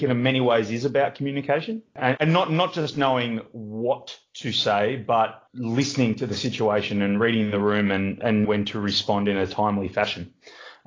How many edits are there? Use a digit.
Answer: 2